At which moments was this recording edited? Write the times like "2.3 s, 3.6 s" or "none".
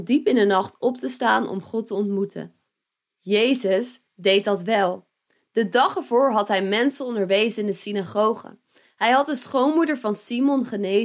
none